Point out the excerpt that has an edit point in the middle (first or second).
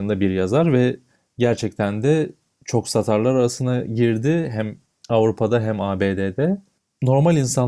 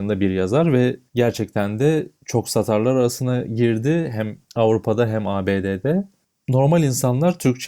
second